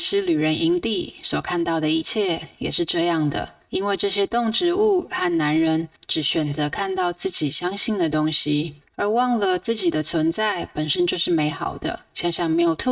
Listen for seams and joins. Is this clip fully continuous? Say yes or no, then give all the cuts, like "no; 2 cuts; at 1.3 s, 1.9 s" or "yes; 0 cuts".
no; 2 cuts; at 6.0 s, 8.8 s